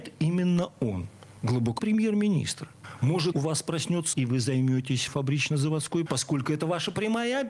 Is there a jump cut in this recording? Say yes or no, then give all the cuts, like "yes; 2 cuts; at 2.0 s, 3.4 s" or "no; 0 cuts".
yes; 5 cuts; at 1.8 s, 3.3 s, 4.1 s, 5.1 s, 6.1 s